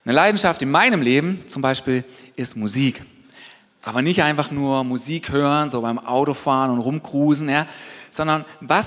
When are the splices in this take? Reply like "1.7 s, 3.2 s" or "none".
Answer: none